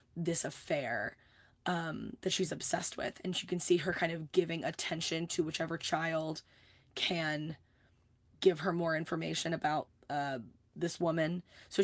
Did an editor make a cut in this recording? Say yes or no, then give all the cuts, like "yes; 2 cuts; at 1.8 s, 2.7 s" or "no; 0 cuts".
no; 0 cuts